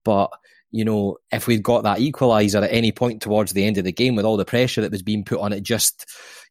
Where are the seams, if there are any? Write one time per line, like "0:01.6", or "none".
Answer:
0:01.2

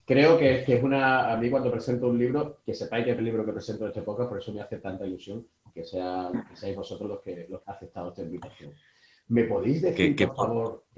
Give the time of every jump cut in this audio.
0:03.2
0:07.6

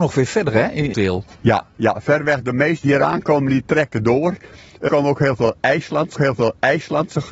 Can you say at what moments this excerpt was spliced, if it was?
0:00.9
0:01.3
0:02.8
0:04.9
0:06.1

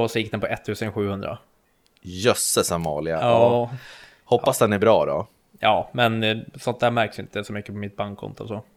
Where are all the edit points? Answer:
0:01.6

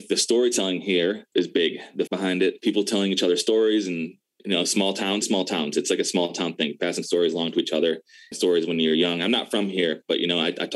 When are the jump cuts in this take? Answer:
0:01.3
0:02.1
0:05.2
0:08.3

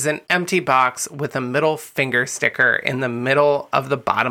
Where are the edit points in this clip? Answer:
none

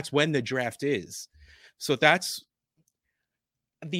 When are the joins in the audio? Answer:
none

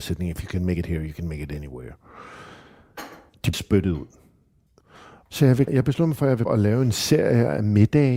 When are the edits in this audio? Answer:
0:03.5
0:05.7
0:06.5

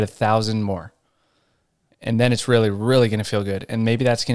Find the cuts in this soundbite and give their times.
none

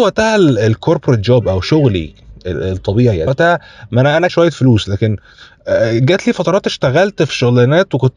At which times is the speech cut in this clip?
0:03.3
0:04.3

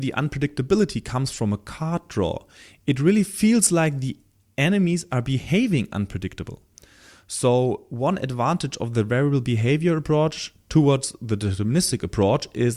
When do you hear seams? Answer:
none

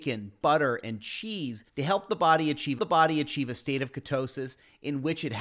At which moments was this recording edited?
0:01.7
0:02.8

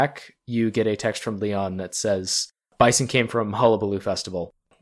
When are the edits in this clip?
none

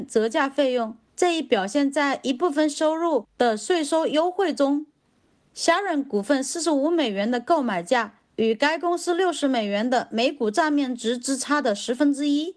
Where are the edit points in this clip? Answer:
0:01.1

